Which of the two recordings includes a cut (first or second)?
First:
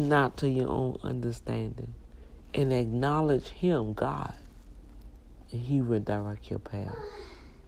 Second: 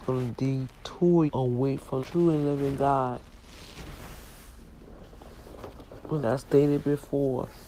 second